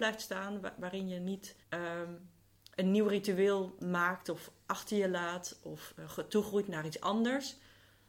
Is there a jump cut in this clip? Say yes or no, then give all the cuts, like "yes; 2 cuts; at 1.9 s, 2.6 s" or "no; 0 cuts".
yes; 1 cut; at 1.6 s